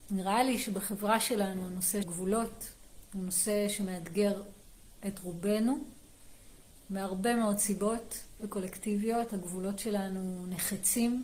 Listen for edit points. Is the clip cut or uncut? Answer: cut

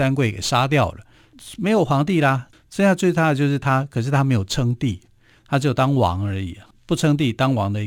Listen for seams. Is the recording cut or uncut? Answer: uncut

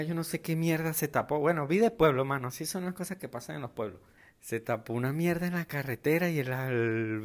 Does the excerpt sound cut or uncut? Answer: uncut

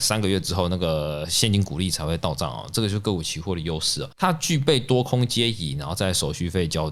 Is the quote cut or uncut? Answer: cut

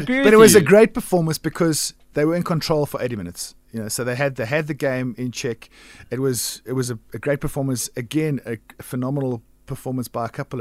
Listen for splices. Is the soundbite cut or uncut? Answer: uncut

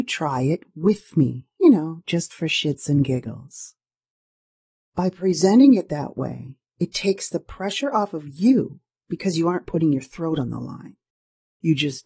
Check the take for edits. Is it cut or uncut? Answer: uncut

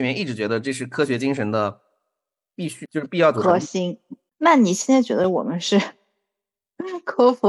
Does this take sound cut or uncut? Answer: uncut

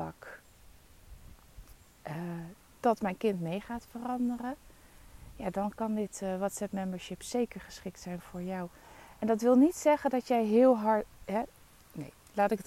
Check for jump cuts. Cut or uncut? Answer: uncut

